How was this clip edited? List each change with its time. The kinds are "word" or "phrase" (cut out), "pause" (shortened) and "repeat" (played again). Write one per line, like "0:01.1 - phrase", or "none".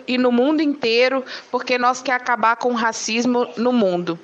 0:02.0 - word